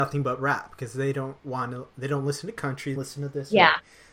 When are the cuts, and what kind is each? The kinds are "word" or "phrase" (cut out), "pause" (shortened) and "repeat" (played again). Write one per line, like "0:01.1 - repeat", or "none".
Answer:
0:03.0 - word